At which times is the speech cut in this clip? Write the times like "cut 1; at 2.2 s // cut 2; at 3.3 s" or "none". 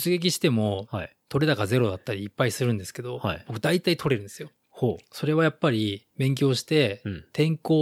cut 1; at 6.1 s